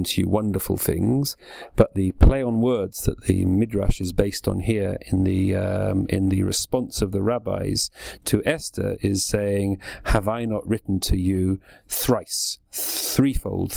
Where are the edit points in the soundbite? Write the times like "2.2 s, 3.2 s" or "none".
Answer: 12.7 s